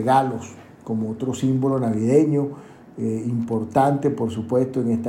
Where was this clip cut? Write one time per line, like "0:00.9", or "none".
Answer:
none